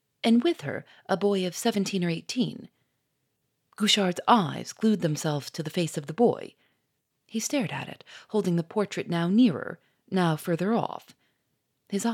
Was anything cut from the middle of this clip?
no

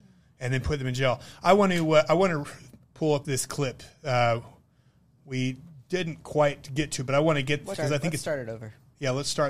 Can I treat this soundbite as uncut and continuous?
no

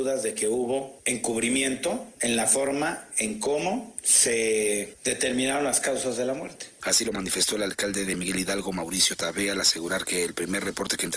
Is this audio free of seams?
yes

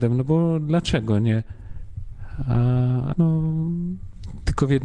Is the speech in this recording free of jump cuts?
no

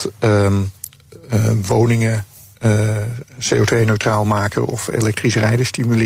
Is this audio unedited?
yes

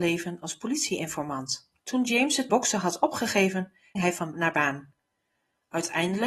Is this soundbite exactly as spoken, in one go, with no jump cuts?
no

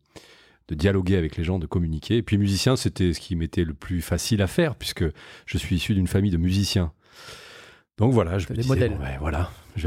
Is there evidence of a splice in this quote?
no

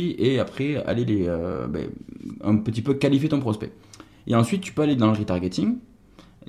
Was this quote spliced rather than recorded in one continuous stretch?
no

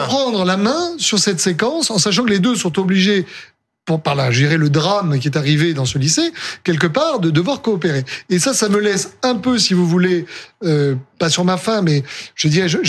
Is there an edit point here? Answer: no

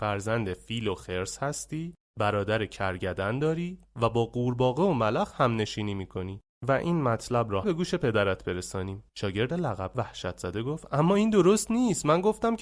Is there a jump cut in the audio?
yes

